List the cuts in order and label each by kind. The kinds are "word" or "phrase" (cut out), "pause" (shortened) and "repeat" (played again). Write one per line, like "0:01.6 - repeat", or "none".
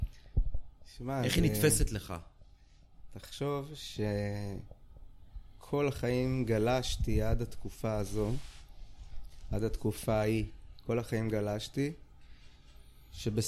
none